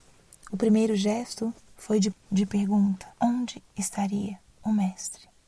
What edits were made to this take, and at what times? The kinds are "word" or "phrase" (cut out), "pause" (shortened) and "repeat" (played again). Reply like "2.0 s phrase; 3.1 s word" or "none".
2.1 s word; 3.1 s pause